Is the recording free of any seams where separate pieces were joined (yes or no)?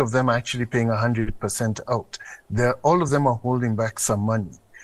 yes